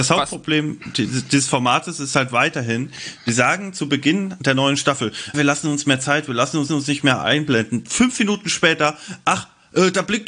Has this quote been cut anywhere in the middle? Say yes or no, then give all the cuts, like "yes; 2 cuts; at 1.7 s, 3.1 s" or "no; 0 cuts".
yes; 2 cuts; at 5.3 s, 6.7 s